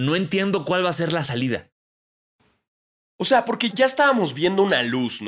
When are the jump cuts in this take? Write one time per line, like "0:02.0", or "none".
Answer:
0:03.7